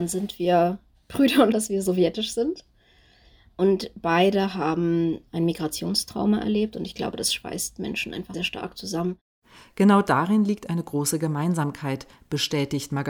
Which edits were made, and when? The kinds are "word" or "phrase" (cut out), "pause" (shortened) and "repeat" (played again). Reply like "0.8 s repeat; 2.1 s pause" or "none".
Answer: 1.5 s word; 8.3 s word